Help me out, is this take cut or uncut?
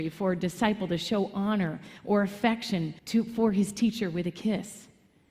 cut